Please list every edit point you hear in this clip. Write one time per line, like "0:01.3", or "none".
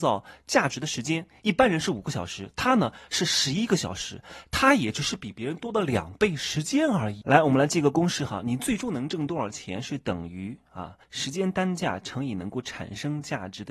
0:11.0